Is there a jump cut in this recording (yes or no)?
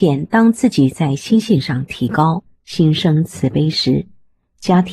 yes